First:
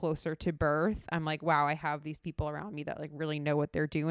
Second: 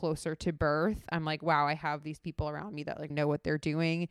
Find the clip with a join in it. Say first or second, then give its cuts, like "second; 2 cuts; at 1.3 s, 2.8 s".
second; 1 cut; at 3.1 s